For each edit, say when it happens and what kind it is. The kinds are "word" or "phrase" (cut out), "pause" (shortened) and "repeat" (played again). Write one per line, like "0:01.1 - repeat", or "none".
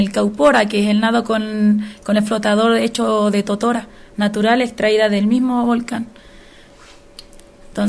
none